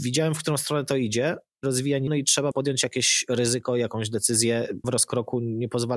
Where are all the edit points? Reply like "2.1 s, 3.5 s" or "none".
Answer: 1.6 s, 2.1 s, 2.5 s, 4.8 s